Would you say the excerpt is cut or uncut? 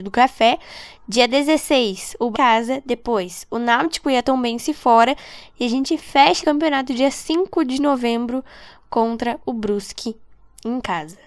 cut